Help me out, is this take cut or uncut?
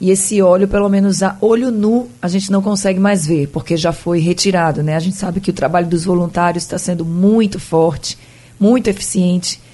uncut